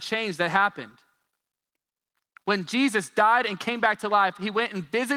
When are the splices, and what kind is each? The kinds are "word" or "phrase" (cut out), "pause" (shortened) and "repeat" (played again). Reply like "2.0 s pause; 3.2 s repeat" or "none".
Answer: none